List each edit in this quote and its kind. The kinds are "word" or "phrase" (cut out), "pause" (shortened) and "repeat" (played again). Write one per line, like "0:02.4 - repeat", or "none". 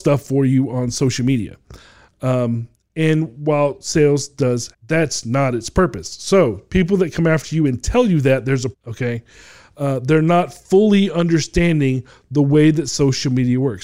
0:04.7 - word
0:08.7 - word